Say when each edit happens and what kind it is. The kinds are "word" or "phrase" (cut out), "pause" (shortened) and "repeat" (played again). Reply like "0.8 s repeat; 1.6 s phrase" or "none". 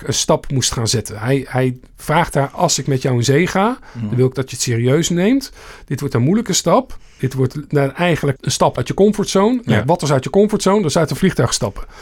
8.4 s phrase; 8.8 s word